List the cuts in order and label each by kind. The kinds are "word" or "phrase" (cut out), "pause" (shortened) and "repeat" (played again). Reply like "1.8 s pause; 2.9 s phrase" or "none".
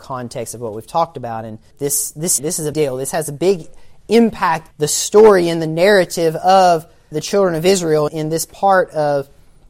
1.7 s word; 2.4 s word; 2.7 s word; 4.7 s word; 7.1 s word; 8.1 s word